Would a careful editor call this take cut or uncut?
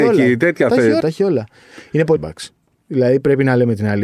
cut